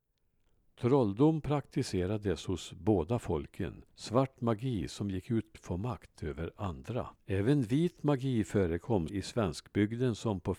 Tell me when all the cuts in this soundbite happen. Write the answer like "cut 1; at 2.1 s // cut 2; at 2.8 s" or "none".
cut 1; at 3.9 s // cut 2; at 5.5 s // cut 3; at 7.2 s // cut 4; at 9.1 s